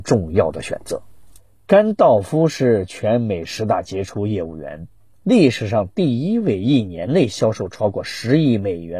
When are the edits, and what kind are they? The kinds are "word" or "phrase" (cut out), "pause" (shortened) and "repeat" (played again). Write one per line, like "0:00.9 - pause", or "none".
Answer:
0:01.4 - pause